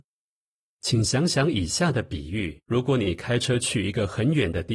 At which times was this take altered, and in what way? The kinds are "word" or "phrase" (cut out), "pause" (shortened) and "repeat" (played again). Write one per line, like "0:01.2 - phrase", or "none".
0:02.6 - pause